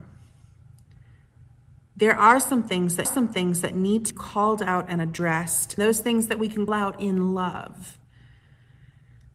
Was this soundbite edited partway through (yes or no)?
yes